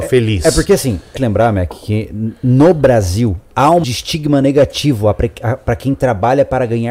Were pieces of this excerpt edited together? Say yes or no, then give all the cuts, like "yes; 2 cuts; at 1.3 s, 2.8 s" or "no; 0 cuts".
yes; 2 cuts; at 1.2 s, 3.8 s